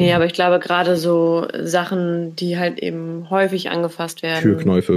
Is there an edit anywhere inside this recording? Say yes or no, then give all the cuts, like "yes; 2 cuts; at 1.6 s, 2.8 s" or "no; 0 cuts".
no; 0 cuts